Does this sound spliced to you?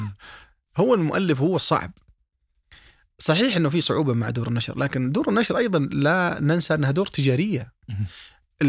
no; 0 cuts

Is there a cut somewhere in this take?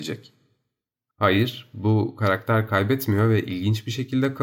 no; 0 cuts

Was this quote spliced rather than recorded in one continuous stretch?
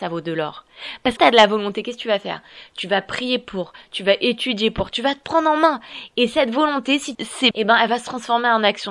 yes; 3 cuts; at 1.2 s, 7.1 s, 7.5 s

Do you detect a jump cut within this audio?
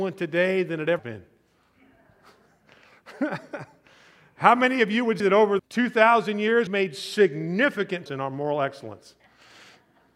yes; 5 cuts; at 1.0 s, 5.2 s, 5.6 s, 6.7 s, 8.1 s

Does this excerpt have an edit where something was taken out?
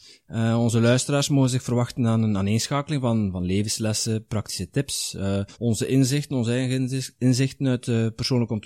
yes; 1 cut; at 5.5 s

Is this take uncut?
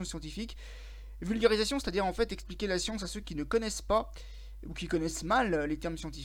yes; 0 cuts

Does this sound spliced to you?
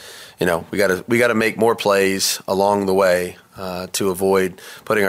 no; 0 cuts

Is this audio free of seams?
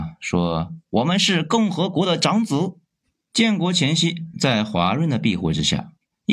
no; 1 cut; at 3.0 s

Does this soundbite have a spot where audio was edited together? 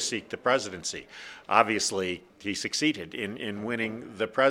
yes; 2 cuts; at 2.3 s, 3.4 s

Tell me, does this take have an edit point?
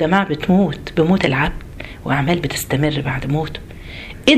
no; 0 cuts

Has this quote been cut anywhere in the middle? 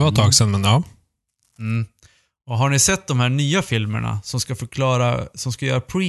no; 0 cuts

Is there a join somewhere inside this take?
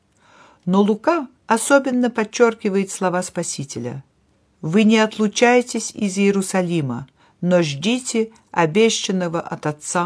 no; 0 cuts

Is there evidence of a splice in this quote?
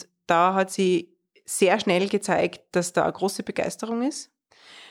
no; 0 cuts

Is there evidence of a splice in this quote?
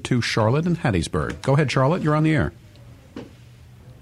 no; 0 cuts

